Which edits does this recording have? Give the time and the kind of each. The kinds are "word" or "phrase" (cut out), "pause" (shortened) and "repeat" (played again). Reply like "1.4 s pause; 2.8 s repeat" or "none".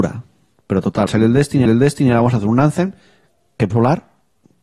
1.1 s phrase; 1.6 s repeat; 3.7 s word